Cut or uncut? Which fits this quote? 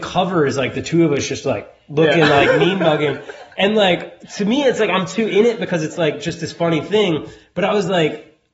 uncut